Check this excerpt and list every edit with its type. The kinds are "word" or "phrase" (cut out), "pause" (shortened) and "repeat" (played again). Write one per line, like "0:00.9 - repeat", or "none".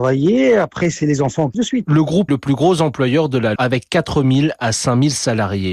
0:01.0 - word
0:01.5 - phrase
0:02.3 - word
0:03.6 - word

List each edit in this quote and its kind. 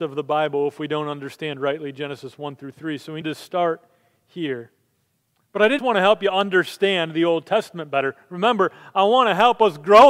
0:03.2 - word
0:05.8 - word

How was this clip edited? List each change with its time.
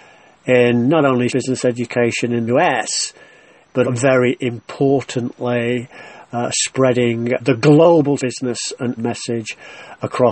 0:01.3 - word
0:02.5 - word
0:03.8 - word
0:07.4 - word
0:08.2 - word
0:09.0 - word

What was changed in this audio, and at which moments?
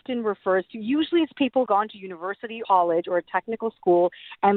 0:01.7 - phrase
0:02.6 - word

